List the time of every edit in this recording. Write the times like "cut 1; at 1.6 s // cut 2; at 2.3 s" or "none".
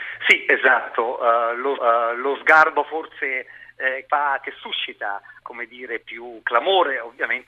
cut 1; at 1.8 s // cut 2; at 4.1 s // cut 3; at 5.4 s